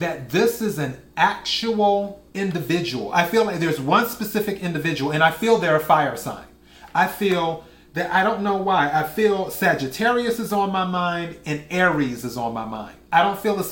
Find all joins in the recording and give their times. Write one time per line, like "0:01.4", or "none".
0:02.3